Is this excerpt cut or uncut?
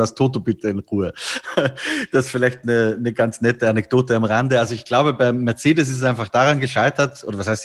uncut